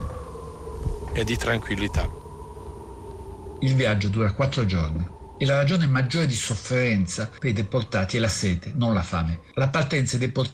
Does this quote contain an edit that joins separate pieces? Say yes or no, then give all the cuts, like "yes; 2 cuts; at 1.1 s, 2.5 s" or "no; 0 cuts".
no; 0 cuts